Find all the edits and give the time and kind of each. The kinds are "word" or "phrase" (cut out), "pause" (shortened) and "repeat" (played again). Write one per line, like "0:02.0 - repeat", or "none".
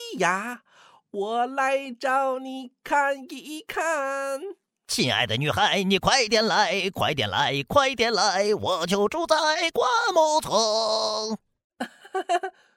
0:04.8 - pause